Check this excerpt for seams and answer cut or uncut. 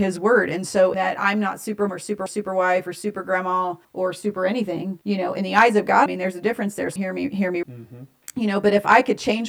cut